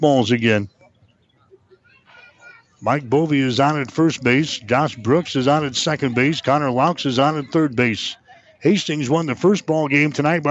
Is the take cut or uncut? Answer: uncut